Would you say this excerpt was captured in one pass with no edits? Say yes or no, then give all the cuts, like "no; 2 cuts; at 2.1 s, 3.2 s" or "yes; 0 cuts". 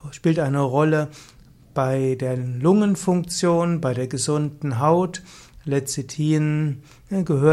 yes; 0 cuts